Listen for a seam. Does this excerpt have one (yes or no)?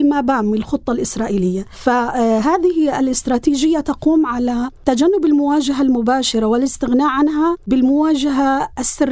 no